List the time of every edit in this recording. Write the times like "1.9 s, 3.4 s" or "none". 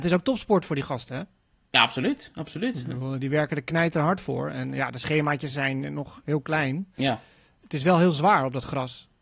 none